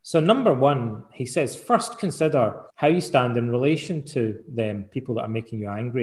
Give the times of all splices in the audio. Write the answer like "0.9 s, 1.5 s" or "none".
2.7 s